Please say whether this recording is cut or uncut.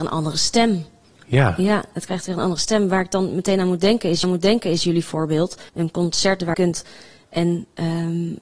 cut